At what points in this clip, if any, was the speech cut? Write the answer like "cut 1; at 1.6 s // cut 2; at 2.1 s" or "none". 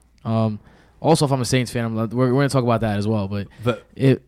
none